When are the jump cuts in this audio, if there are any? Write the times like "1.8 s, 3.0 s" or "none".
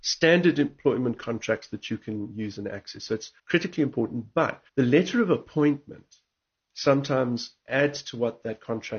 3.4 s, 4.7 s, 6.4 s